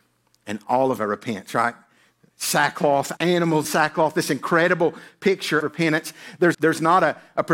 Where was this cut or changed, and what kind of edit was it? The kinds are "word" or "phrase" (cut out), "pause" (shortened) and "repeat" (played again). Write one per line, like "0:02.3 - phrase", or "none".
0:01.0 - word
0:03.2 - word
0:03.6 - word
0:05.6 - word
0:06.5 - word